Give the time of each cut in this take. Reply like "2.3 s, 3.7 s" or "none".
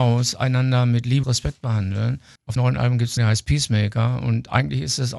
1.2 s, 2.6 s, 3.2 s